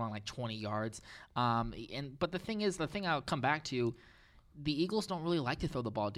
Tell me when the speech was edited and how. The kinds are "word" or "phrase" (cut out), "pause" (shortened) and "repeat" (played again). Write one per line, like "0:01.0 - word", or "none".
none